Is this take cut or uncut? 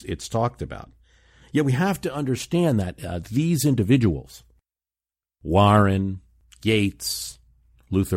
uncut